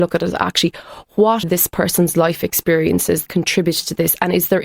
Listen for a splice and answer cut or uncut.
cut